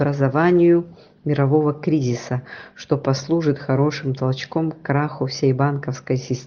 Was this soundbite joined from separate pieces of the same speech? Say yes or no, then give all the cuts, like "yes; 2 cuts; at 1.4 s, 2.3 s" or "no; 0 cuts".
no; 0 cuts